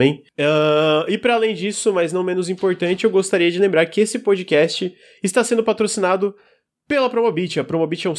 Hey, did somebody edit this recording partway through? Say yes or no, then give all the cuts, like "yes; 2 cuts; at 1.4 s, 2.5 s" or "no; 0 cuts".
no; 0 cuts